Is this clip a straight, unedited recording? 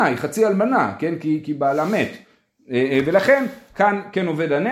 yes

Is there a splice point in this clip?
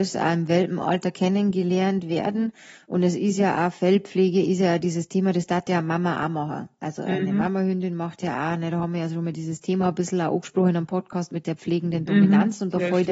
no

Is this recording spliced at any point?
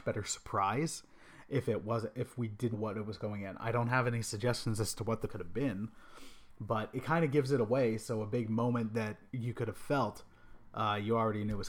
yes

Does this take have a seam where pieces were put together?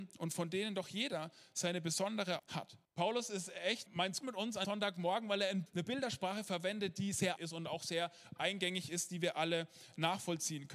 yes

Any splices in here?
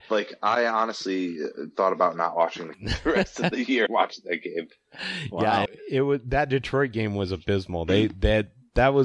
yes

